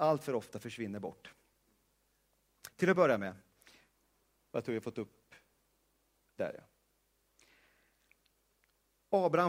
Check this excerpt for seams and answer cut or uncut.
uncut